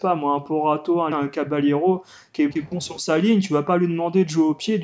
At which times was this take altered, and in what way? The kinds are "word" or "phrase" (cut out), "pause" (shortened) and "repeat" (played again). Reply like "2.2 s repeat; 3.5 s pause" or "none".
1.1 s word; 2.5 s word